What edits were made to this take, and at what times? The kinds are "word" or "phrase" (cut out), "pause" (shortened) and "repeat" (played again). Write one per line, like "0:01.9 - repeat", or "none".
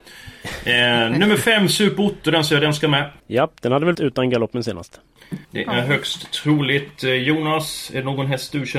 0:03.2 - pause
0:03.9 - word
0:05.4 - pause